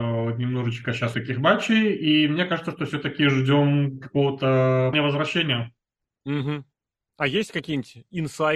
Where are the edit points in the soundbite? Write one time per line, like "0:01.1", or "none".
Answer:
0:01.1
0:04.9

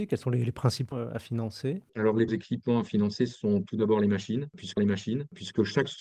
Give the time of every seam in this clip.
0:00.9
0:01.9
0:02.3
0:04.8

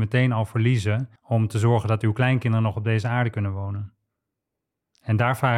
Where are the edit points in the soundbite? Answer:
0:01.2

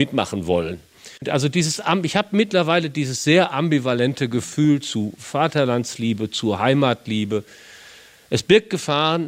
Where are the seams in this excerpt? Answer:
none

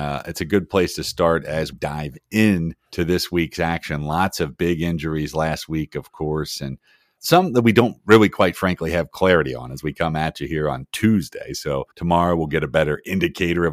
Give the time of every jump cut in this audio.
0:01.7
0:02.9
0:07.2
0:11.9

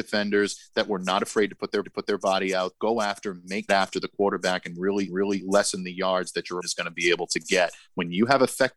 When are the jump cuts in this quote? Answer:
0:01.8
0:02.7
0:03.7
0:05.1
0:06.6

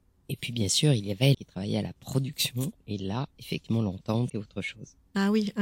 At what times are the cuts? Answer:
0:01.3
0:04.3

